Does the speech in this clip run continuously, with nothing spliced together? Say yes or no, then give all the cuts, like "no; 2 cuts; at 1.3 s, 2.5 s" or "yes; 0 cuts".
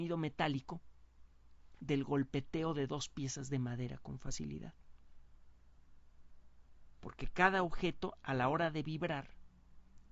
yes; 0 cuts